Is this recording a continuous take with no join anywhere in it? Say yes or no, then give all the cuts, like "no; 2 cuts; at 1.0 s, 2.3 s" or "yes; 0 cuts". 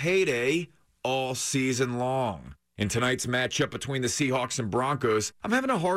yes; 0 cuts